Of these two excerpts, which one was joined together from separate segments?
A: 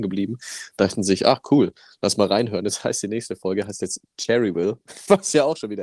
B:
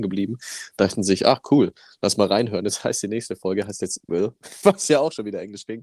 B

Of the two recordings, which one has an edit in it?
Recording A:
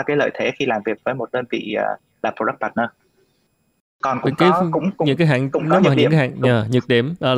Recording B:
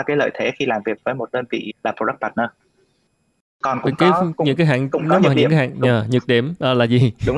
B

